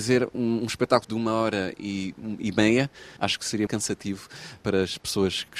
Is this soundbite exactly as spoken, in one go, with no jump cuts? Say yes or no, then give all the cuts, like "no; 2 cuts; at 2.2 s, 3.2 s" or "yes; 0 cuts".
no; 3 cuts; at 1.0 s, 3.2 s, 3.7 s